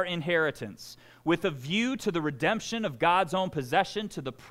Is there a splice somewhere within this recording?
no; 0 cuts

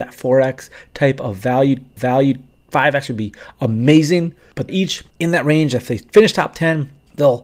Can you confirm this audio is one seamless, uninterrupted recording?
no; 2 cuts; at 2.0 s, 4.7 s

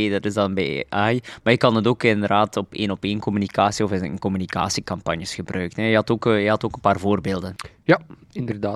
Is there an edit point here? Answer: no; 0 cuts

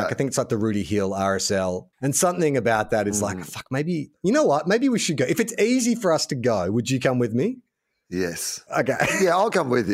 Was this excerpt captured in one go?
no; 2 cuts; at 1.9 s, 8.7 s

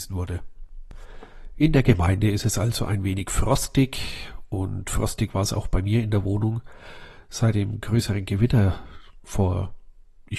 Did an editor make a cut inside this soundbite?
no; 0 cuts

